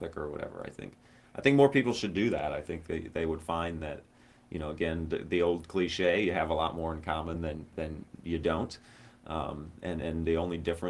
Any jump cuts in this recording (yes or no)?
no